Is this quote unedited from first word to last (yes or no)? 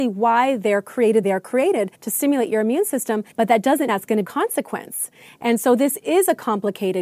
no